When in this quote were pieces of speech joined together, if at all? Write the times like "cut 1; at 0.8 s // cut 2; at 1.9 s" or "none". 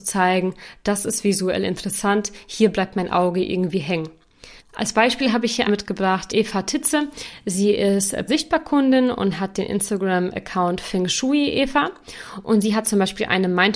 cut 1; at 4.6 s // cut 2; at 5.7 s // cut 3; at 6.3 s // cut 4; at 8.3 s